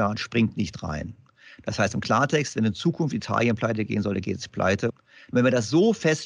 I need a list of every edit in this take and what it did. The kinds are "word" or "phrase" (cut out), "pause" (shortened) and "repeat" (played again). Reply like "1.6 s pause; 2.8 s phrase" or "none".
none